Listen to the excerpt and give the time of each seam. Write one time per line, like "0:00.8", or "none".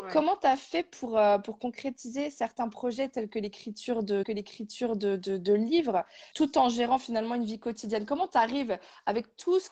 0:04.2
0:06.3